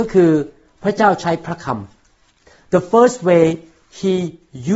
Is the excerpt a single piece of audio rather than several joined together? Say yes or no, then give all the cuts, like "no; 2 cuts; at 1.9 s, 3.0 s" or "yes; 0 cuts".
yes; 0 cuts